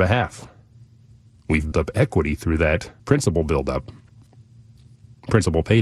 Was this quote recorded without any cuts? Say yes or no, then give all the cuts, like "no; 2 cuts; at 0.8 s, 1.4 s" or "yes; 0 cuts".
no; 2 cuts; at 1.7 s, 3.0 s